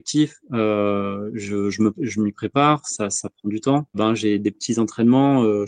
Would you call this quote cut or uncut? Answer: cut